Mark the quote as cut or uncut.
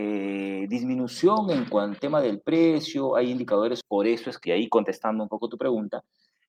cut